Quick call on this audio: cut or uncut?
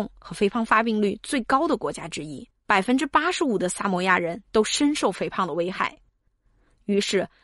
cut